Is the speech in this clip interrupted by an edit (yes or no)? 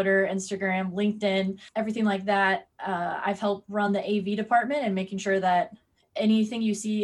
no